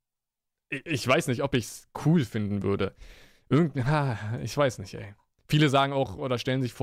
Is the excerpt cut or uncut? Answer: uncut